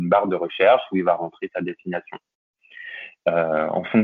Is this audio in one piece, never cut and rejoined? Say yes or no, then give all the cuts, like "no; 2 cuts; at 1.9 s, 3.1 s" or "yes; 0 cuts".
yes; 0 cuts